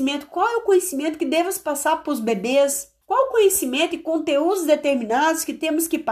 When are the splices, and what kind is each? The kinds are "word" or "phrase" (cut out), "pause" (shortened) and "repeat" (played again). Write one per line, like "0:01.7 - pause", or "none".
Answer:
0:03.0 - pause